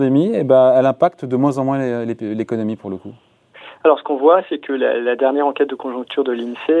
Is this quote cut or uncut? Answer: uncut